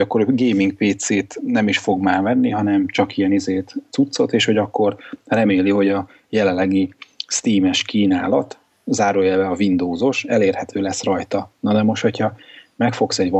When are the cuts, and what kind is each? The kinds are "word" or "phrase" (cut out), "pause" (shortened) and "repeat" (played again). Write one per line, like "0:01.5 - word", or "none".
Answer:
none